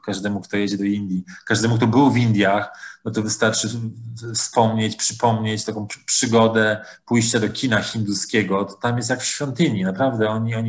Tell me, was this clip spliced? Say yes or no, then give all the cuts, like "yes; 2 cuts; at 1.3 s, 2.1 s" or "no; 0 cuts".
no; 0 cuts